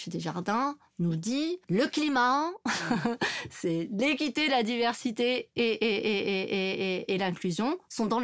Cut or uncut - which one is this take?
cut